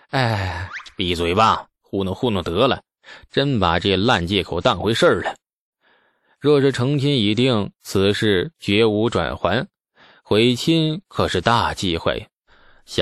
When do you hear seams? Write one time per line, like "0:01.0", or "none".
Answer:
none